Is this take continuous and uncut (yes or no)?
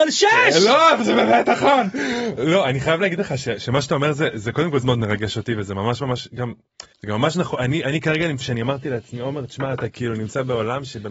no